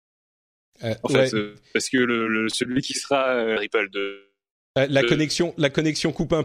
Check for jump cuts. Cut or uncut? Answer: uncut